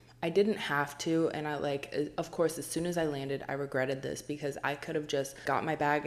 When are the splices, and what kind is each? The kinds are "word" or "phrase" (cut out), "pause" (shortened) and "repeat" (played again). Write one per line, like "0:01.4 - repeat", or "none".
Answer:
none